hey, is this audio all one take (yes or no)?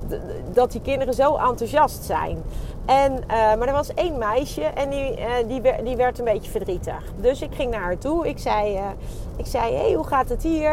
yes